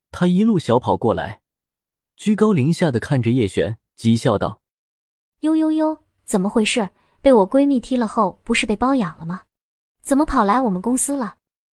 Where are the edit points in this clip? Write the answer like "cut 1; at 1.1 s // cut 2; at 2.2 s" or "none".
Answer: cut 1; at 3.9 s